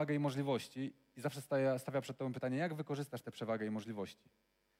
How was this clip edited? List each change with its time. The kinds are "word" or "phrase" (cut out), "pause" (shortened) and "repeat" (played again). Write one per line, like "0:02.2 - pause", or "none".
none